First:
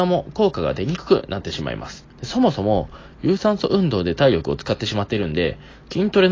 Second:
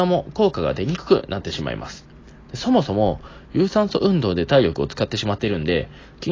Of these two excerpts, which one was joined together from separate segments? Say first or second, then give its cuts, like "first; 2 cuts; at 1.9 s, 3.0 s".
first; 1 cut; at 2.1 s